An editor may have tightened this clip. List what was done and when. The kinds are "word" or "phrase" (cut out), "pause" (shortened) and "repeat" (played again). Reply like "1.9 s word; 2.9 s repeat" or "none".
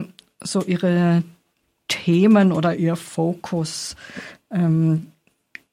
none